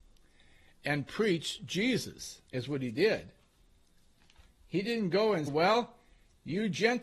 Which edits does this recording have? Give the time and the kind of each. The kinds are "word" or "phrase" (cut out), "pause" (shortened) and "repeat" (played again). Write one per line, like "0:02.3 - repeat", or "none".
0:02.5 - pause
0:04.5 - pause
0:05.5 - word